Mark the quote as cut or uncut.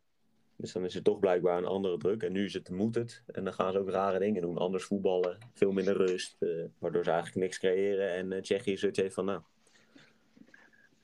cut